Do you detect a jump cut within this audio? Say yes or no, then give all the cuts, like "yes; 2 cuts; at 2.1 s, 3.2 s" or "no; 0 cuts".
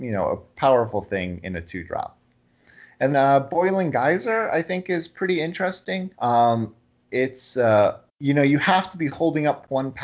yes; 3 cuts; at 3.1 s, 6.1 s, 8.1 s